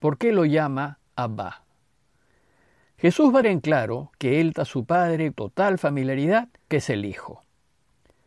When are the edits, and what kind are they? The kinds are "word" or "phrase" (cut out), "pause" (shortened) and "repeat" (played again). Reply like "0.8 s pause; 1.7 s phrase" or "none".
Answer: 3.4 s word; 4.5 s word; 5.3 s word; 6.7 s word